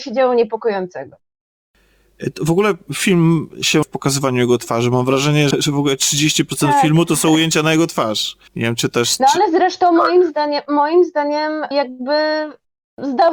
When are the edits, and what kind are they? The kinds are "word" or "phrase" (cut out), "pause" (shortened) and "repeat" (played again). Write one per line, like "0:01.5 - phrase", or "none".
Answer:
0:03.8 - word
0:05.5 - word
0:08.5 - pause
0:11.7 - word